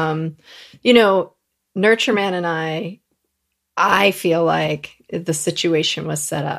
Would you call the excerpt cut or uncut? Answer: uncut